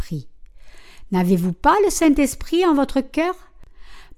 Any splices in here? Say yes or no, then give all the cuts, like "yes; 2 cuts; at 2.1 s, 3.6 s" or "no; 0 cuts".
no; 0 cuts